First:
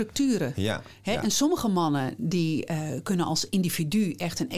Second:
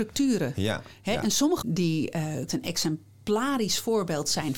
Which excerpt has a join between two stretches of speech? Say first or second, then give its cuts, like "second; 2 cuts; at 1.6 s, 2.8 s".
second; 2 cuts; at 1.6 s, 2.5 s